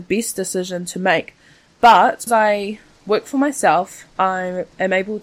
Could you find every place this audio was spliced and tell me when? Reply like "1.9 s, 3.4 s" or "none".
2.3 s, 4.1 s